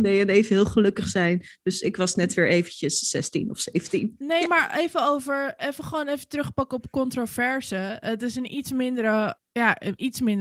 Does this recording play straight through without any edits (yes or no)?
no